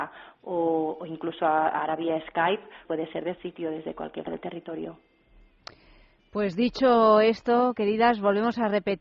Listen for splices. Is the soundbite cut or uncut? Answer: cut